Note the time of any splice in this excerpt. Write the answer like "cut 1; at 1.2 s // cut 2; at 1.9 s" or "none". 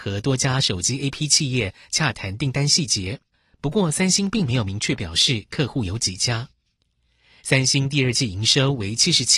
none